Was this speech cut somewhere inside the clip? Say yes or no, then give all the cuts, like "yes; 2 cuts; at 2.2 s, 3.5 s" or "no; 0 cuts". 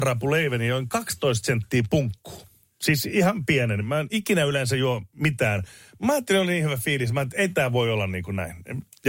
no; 0 cuts